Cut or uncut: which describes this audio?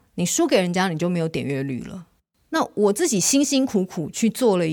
uncut